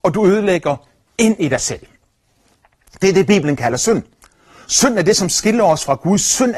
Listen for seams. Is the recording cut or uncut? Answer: uncut